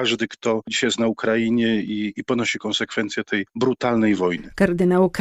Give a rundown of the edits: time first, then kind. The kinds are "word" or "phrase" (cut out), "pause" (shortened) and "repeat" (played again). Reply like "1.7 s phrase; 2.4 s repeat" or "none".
none